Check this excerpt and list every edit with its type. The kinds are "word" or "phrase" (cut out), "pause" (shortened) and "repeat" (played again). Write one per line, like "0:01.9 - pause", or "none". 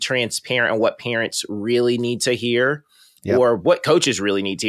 none